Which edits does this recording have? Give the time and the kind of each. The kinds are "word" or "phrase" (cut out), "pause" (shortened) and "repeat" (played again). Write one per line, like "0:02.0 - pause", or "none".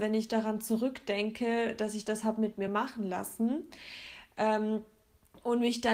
none